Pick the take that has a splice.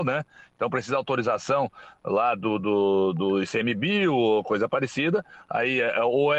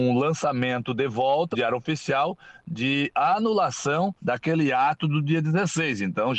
second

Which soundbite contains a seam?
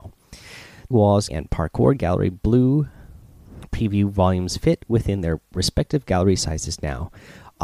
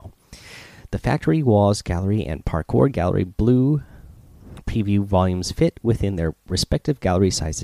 first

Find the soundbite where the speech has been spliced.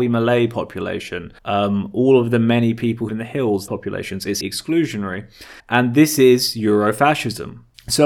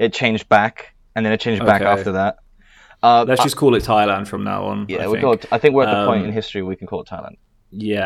first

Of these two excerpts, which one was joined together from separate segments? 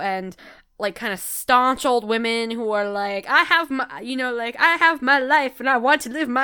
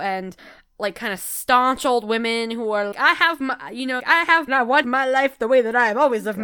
second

